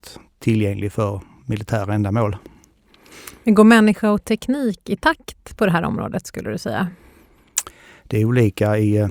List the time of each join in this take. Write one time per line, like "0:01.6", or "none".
none